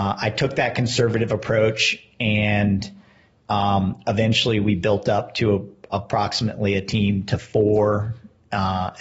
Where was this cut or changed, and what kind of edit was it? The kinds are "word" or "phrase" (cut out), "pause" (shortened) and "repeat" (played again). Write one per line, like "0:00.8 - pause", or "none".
none